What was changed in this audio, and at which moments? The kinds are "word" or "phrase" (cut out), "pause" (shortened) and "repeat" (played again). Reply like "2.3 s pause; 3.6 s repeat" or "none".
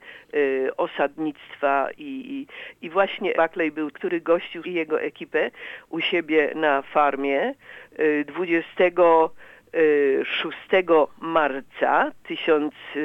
2.0 s word; 3.3 s word; 3.9 s word; 4.6 s word